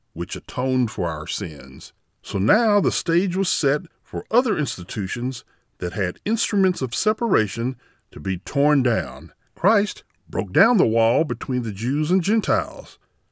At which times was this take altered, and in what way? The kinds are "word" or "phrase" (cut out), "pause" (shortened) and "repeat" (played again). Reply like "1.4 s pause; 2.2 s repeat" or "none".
2.0 s pause; 9.5 s pause